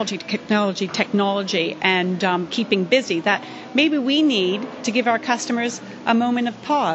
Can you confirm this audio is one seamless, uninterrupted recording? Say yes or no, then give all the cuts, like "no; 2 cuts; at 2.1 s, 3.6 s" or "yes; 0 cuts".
yes; 0 cuts